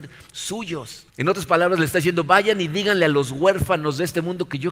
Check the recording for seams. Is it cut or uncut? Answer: cut